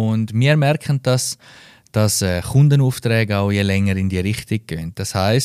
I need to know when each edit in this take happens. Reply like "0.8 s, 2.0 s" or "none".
none